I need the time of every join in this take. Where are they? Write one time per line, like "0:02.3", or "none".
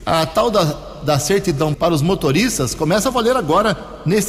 0:01.7